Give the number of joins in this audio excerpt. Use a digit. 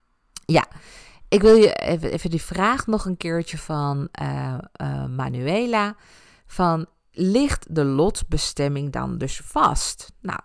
0